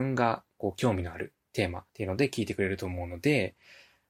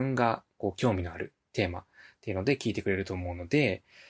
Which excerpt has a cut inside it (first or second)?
first